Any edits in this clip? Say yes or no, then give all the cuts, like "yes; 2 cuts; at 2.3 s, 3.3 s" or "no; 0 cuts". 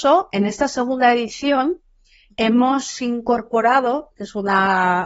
yes; 1 cut; at 2.3 s